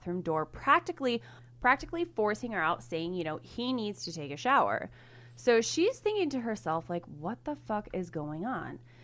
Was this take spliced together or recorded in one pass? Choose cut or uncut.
uncut